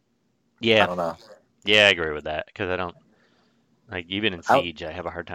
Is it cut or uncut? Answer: uncut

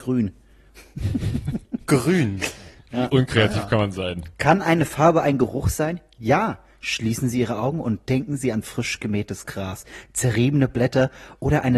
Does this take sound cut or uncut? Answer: uncut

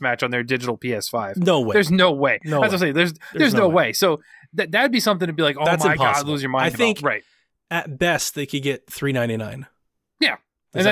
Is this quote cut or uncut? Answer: uncut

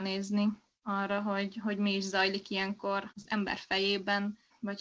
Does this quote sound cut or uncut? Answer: uncut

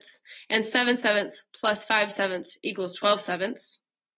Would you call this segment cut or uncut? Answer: uncut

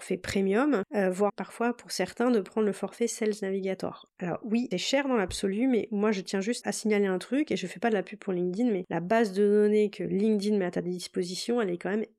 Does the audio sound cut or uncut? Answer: cut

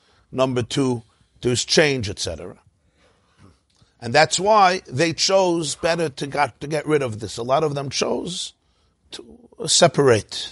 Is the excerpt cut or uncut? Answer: uncut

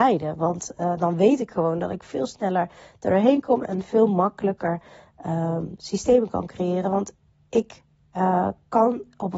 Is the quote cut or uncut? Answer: uncut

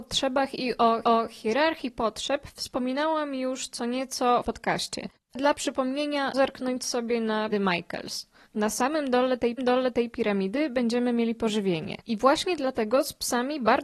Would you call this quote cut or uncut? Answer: cut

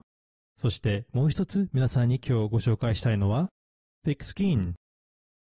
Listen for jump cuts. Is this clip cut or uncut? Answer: uncut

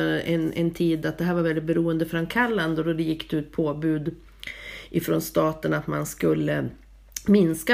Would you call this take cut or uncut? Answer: uncut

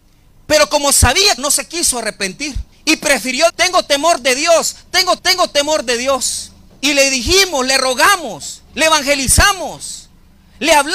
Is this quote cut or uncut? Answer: cut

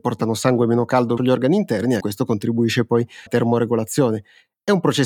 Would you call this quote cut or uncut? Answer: cut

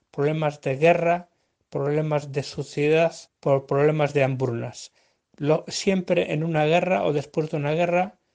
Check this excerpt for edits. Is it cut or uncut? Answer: cut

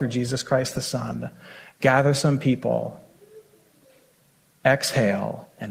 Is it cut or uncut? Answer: uncut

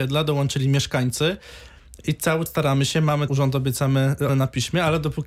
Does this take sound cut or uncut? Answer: cut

